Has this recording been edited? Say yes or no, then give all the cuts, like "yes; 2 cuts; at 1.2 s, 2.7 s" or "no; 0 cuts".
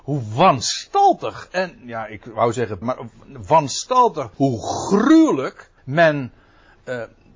yes; 3 cuts; at 2.8 s, 4.3 s, 5.8 s